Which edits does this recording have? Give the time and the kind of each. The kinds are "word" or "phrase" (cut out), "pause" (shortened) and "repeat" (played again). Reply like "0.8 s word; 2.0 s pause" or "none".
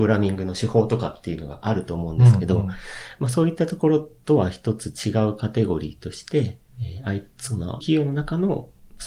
6.7 s pause; 7.8 s word